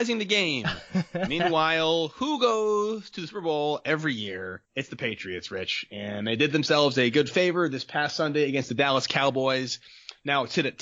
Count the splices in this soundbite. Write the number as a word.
one